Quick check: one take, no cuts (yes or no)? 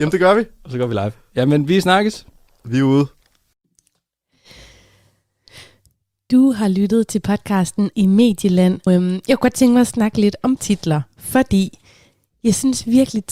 no